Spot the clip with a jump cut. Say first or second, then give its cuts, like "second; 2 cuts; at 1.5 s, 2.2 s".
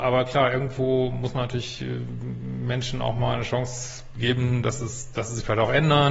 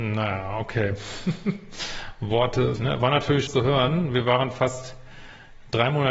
second; 2 cuts; at 2.8 s, 3.5 s